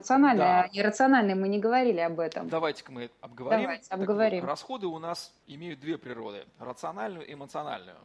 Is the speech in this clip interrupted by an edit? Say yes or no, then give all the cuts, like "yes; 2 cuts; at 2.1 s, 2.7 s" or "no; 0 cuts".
no; 0 cuts